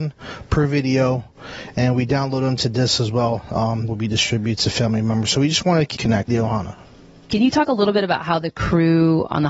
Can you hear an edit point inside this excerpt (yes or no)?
yes